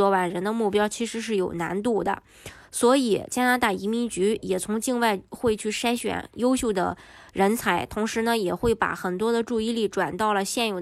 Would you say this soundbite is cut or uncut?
uncut